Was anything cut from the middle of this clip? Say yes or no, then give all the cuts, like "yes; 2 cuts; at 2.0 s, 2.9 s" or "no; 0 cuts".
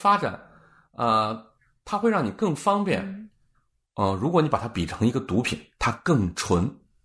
no; 0 cuts